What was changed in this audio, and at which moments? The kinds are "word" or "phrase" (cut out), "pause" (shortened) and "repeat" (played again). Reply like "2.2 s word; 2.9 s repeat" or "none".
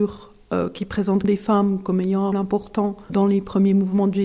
1.2 s word; 2.3 s word; 3.1 s word